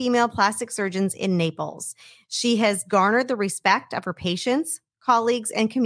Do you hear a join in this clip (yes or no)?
no